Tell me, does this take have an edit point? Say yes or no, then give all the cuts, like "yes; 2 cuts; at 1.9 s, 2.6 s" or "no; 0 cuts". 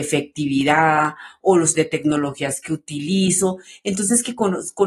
yes; 1 cut; at 1.7 s